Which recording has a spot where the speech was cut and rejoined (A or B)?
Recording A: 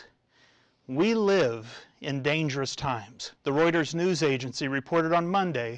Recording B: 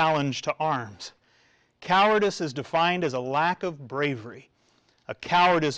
A